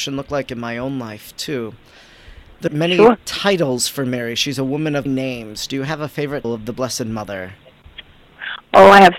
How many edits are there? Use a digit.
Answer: 3